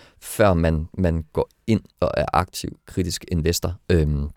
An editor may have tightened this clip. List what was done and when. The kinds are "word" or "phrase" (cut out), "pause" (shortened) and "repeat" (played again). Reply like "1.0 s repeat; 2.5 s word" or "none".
1.9 s pause